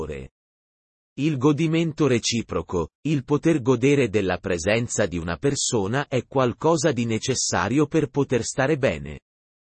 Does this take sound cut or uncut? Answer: cut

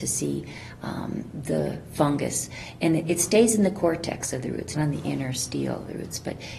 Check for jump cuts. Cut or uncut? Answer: cut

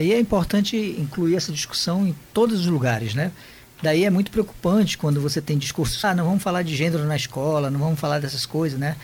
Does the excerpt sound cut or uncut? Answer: cut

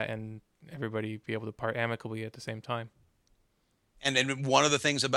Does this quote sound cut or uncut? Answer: uncut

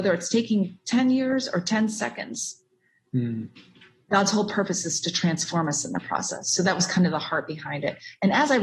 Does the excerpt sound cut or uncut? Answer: uncut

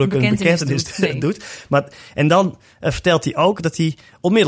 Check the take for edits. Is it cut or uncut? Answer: uncut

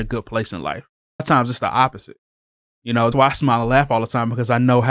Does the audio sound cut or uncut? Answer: cut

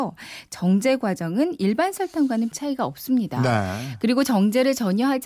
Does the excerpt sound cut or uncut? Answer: cut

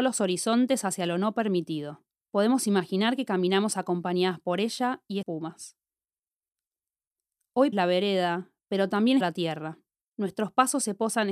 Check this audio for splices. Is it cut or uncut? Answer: cut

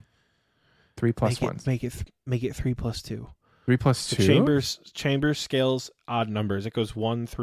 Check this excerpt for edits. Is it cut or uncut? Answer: uncut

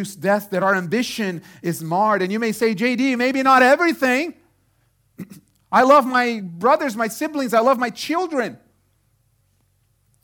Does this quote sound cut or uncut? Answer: uncut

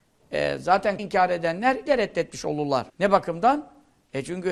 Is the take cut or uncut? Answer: cut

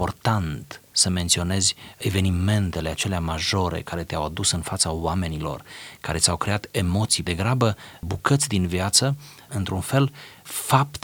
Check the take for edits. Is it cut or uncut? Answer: cut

